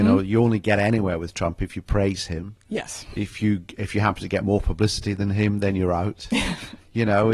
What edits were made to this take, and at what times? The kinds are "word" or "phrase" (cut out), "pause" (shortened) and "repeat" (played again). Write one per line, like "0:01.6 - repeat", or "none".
none